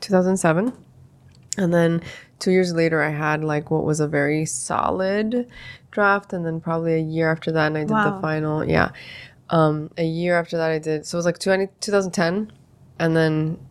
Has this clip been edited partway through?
no; 0 cuts

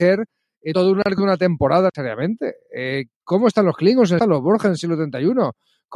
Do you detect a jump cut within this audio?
no; 0 cuts

